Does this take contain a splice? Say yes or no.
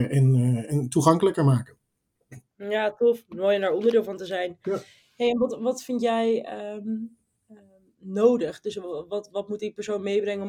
no